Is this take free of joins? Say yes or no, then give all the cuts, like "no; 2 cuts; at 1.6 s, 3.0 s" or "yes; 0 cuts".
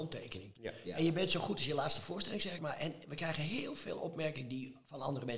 no; 1 cut; at 2.6 s